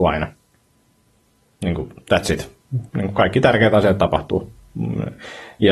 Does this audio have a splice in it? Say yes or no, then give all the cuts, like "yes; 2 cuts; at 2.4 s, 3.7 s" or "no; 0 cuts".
yes; 1 cut; at 2.9 s